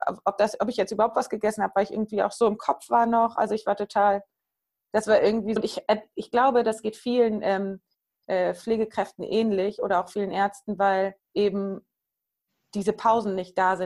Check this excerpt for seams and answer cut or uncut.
cut